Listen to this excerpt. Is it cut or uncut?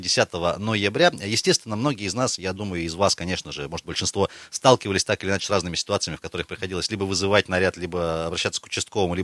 uncut